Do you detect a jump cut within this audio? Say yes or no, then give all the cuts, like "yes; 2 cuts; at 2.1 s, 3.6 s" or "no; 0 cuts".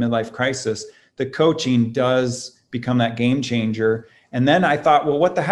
no; 0 cuts